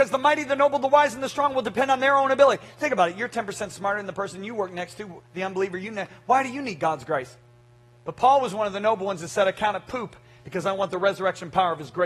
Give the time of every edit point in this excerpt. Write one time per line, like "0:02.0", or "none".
none